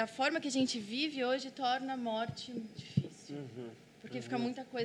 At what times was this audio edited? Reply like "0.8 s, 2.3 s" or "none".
2.8 s